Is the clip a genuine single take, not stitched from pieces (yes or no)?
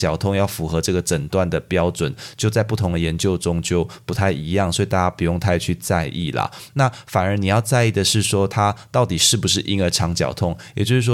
yes